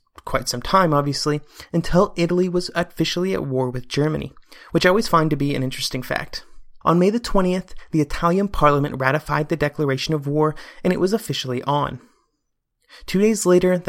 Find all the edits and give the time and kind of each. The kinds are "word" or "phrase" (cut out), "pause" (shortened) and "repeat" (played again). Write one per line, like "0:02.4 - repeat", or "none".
0:06.8 - pause